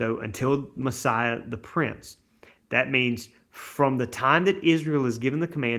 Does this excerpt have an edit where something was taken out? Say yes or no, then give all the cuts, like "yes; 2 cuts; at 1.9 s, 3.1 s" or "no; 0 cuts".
no; 0 cuts